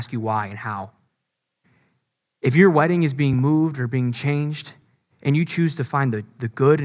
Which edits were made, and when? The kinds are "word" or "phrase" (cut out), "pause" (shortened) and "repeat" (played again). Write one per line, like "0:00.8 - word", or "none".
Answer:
none